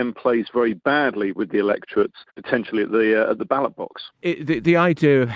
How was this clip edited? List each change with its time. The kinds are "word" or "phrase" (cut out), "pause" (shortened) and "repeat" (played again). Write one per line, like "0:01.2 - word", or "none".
0:02.3 - pause
0:04.1 - pause